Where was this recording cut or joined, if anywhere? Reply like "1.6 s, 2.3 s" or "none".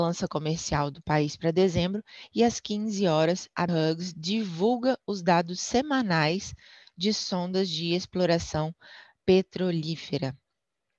3.7 s

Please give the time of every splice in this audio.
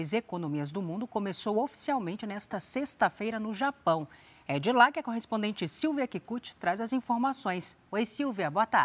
none

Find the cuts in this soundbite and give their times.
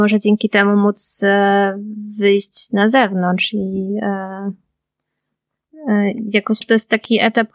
6.6 s

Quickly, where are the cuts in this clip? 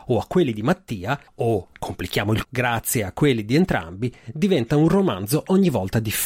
1.3 s, 2.4 s

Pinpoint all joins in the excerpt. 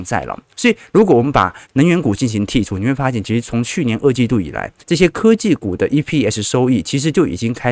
1.6 s, 4.8 s

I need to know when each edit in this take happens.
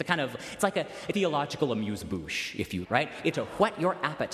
1.1 s, 2.8 s, 3.3 s

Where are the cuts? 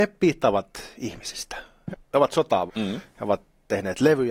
1.9 s, 2.7 s

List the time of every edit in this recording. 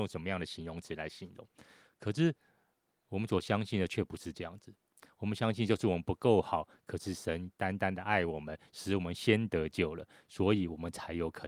none

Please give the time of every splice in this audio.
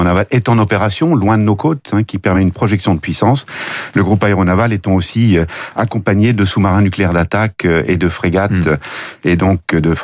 none

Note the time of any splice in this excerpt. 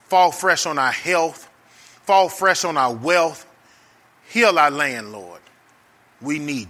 none

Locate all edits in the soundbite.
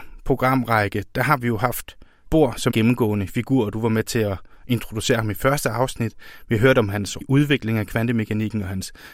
2.3 s, 2.7 s, 7.2 s

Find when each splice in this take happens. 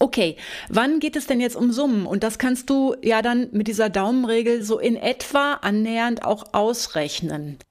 none

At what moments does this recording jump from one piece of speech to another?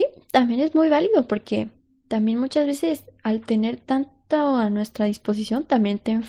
none

